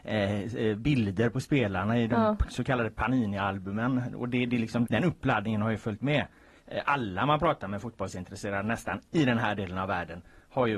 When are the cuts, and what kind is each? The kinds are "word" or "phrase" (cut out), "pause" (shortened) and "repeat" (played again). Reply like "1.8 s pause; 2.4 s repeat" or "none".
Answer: 4.8 s word